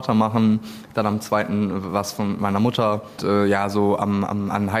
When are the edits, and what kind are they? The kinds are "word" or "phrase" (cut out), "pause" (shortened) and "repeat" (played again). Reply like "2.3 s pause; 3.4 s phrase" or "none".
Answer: 3.2 s word